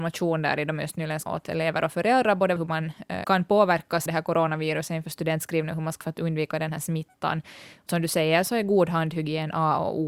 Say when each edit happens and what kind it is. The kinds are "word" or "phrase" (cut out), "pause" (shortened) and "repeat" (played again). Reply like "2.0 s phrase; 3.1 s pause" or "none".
1.3 s word; 2.6 s word; 3.2 s word; 4.1 s word; 6.0 s word; 7.9 s word